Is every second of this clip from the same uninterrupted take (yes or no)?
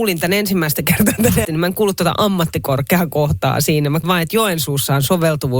no